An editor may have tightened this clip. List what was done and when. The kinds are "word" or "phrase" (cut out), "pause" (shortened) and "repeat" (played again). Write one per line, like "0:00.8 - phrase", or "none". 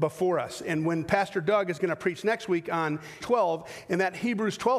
0:03.2 - word